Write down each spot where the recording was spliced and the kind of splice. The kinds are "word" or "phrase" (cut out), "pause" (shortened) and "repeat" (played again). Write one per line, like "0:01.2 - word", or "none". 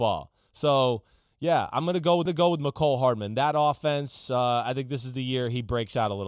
0:02.3 - repeat

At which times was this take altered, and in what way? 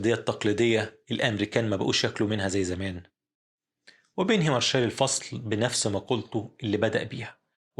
none

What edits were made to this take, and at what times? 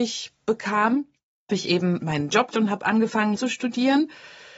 0:01.5 - word
0:02.0 - word
0:02.5 - word
0:03.4 - word

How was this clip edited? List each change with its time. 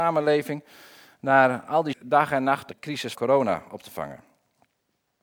0:01.9 - phrase
0:02.7 - phrase
0:03.1 - word

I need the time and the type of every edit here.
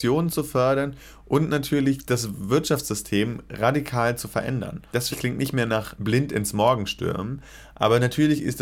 0:05.1 - word

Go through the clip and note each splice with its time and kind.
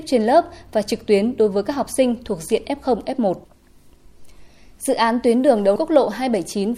0:05.8 - word

